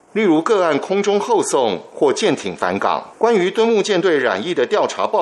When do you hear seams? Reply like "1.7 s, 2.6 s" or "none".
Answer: 3.2 s